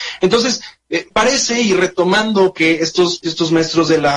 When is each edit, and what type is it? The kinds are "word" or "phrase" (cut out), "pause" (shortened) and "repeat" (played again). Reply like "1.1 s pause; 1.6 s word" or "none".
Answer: 1.1 s word; 2.5 s phrase; 3.2 s word